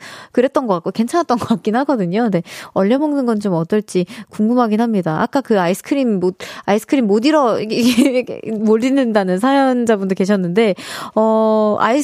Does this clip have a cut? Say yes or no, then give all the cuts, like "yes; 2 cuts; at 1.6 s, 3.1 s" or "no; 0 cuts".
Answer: no; 0 cuts